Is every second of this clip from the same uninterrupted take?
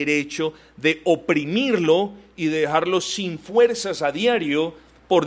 yes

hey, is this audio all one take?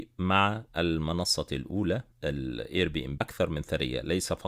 no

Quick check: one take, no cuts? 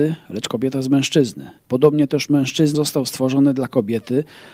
no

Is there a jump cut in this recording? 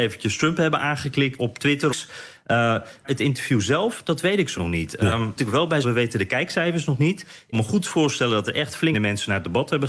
yes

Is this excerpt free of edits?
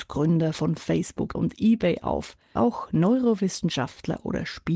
no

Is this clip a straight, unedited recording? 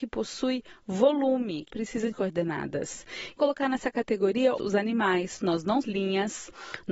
no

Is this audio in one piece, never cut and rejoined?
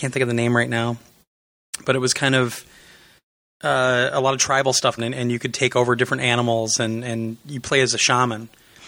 no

